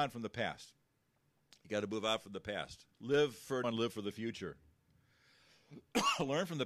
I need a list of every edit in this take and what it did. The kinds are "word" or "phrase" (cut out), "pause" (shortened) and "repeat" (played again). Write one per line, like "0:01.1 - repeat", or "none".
0:02.9 - pause
0:03.6 - word